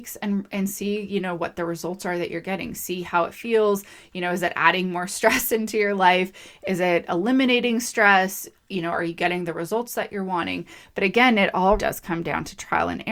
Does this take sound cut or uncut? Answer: cut